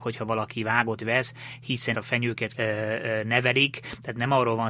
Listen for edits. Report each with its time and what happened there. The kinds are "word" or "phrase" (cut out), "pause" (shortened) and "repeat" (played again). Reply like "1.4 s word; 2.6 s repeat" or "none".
1.0 s word; 1.9 s word; 2.5 s phrase